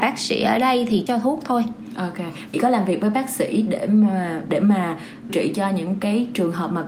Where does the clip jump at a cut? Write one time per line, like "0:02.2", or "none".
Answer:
0:01.1
0:02.5
0:05.3